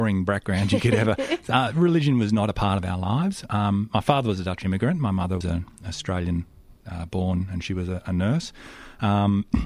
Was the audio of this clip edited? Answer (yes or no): yes